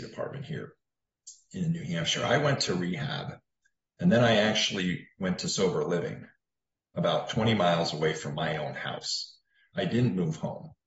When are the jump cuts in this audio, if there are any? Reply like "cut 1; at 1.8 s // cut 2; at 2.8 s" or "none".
none